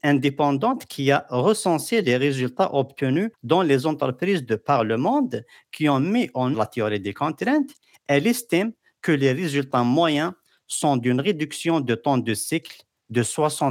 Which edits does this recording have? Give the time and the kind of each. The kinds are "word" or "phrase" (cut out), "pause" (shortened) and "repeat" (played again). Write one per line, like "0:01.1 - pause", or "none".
0:03.3 - pause
0:06.5 - word